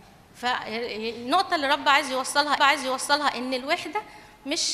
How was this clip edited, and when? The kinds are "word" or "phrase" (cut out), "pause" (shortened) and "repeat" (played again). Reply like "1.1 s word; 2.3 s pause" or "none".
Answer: 2.6 s repeat